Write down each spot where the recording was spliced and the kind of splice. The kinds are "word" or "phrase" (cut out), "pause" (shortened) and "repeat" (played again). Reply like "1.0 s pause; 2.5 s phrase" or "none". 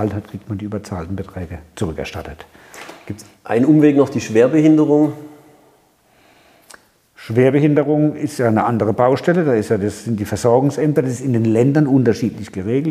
none